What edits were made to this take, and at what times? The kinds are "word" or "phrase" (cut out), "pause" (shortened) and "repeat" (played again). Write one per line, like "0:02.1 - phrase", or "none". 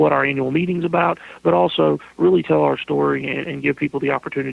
none